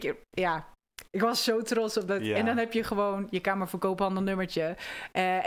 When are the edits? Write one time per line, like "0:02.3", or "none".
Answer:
none

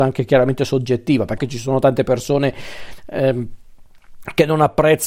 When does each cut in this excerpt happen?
0:01.4

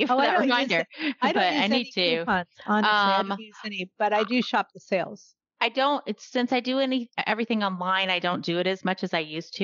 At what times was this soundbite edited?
0:02.5

